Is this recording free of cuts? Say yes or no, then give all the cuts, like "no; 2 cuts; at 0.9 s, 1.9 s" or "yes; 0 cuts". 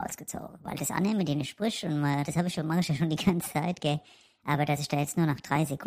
yes; 0 cuts